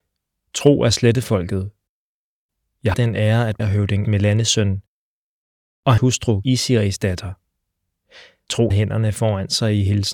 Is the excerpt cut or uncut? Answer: cut